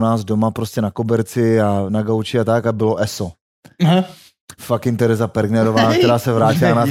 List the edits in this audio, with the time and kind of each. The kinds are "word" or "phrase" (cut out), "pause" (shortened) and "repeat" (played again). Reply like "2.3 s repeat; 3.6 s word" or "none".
none

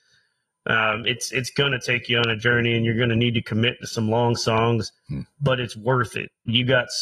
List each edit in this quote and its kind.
none

